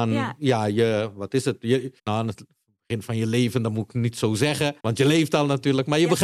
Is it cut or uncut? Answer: cut